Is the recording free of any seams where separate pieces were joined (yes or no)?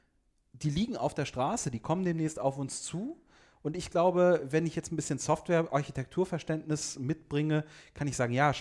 yes